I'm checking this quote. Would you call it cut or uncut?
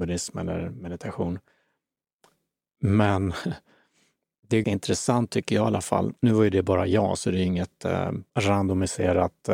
cut